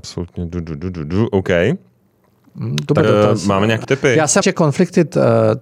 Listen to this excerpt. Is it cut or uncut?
cut